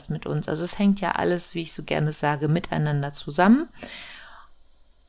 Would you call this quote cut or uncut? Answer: uncut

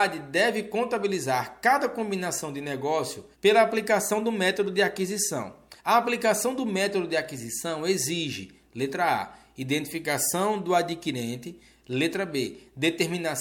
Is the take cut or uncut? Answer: cut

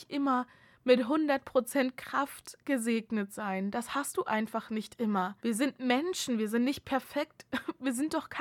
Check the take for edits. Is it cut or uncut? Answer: cut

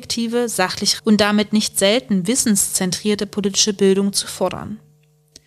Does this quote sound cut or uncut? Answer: cut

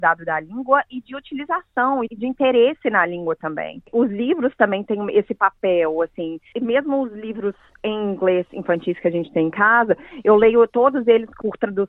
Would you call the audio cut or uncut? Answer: uncut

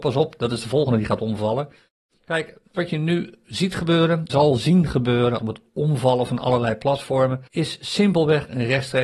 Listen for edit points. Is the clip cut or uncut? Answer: cut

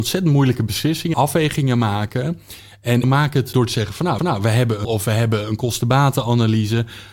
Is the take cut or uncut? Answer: cut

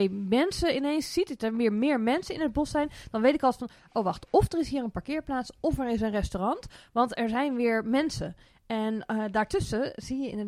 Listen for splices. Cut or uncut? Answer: uncut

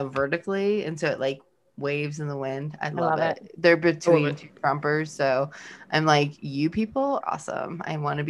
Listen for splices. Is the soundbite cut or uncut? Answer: cut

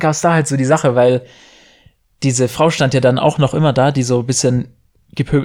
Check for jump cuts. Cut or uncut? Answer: uncut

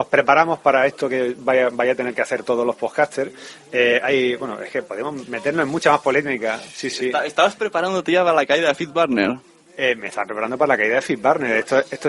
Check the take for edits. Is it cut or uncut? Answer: uncut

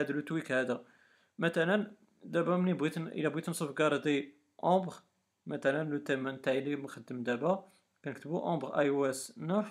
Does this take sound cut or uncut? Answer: uncut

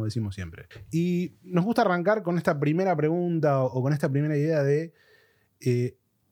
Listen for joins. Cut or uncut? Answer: uncut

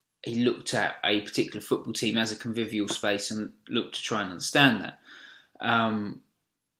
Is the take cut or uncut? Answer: uncut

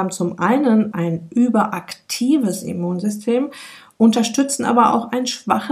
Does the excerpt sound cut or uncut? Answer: cut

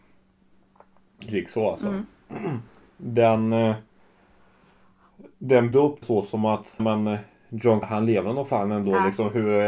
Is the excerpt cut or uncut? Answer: cut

